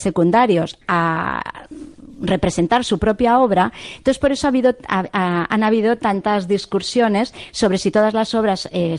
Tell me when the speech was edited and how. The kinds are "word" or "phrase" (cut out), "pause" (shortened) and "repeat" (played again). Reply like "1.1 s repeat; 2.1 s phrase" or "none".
none

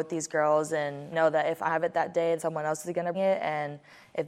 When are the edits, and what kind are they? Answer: 1.1 s word; 1.7 s word; 2.4 s word; 3.1 s word

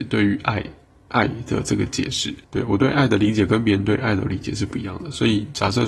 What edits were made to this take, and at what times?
2.4 s pause

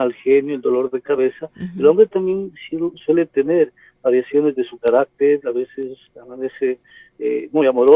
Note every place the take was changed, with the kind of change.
none

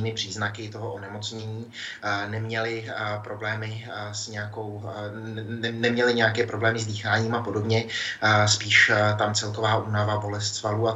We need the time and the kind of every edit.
9.3 s word

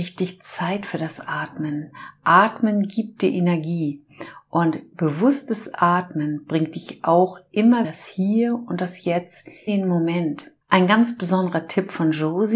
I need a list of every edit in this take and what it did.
7.8 s phrase; 9.7 s word; 10.6 s pause

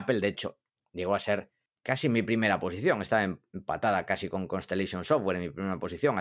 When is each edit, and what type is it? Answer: none

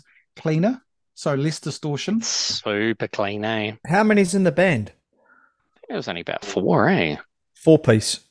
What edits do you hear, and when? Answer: 3.8 s pause

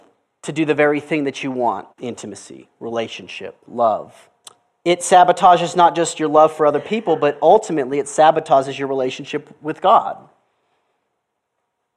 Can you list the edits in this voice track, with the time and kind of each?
1.9 s pause; 4.4 s pause; 9.6 s pause

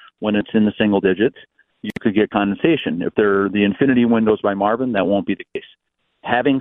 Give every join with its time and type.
none

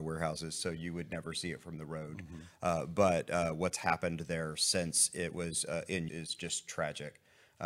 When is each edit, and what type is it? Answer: 6.1 s word

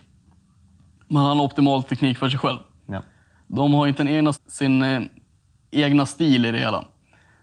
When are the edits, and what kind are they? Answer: 4.0 s word; 4.3 s word

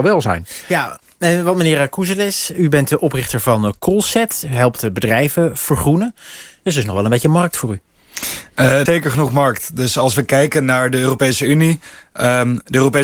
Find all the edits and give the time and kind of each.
8.9 s word

